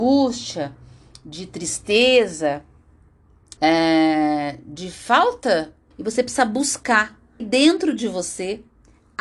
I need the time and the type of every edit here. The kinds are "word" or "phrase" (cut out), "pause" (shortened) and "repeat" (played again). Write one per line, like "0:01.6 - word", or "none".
0:03.6 - pause
0:05.9 - phrase
0:07.4 - word